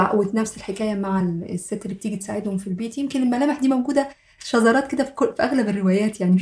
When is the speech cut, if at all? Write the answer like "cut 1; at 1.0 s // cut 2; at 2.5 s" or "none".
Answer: none